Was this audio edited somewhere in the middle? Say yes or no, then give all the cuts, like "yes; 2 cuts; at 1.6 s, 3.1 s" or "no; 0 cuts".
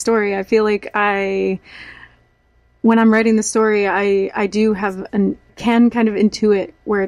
yes; 1 cut; at 5.5 s